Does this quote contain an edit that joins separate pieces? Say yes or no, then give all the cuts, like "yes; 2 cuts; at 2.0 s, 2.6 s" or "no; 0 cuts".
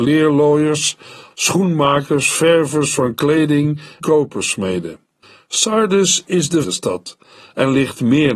yes; 3 cuts; at 1.3 s, 4.0 s, 6.6 s